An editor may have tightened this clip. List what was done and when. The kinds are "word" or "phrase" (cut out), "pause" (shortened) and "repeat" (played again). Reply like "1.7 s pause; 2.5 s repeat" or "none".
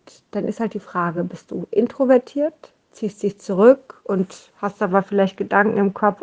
none